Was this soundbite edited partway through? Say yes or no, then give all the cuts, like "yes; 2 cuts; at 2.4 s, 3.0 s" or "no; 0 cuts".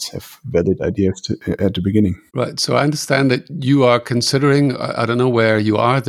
yes; 1 cut; at 2.3 s